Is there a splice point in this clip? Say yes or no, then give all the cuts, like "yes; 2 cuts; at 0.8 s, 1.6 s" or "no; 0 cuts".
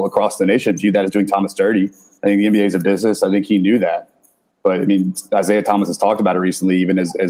no; 0 cuts